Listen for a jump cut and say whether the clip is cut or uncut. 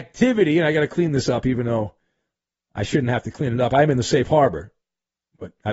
uncut